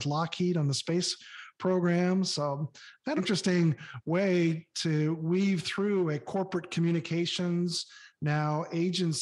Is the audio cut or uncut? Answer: cut